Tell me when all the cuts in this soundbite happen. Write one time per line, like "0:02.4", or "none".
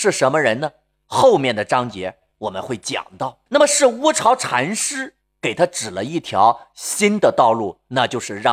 0:03.5

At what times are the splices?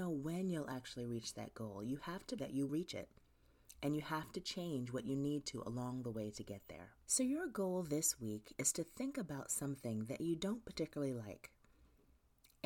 0:02.4
0:02.7
0:07.0

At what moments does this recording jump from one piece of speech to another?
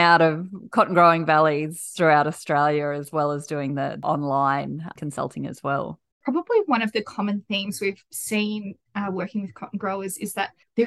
0:06.1

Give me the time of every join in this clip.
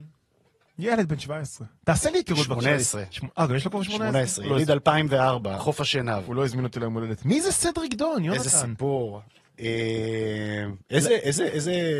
0:05.6

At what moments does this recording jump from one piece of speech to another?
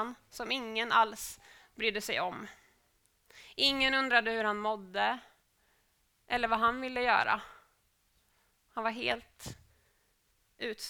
none

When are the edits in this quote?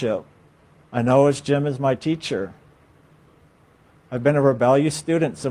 none

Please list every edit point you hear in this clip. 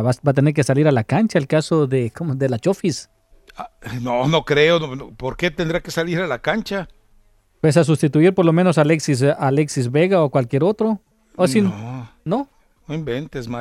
0:03.3

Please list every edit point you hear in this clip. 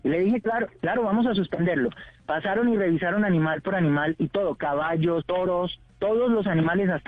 0:05.2

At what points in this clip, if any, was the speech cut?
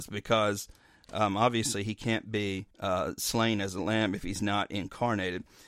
0:02.7

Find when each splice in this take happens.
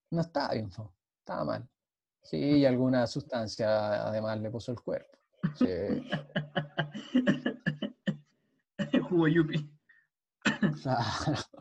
none

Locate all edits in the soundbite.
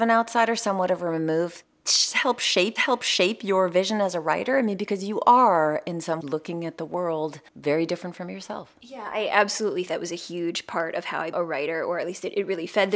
0:02.8
0:06.2
0:07.5
0:09.9
0:11.3

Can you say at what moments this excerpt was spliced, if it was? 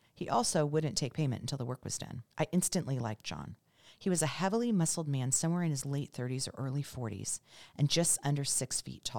0:02.3

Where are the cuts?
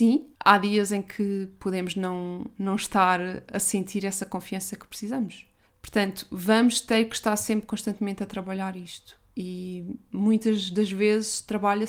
none

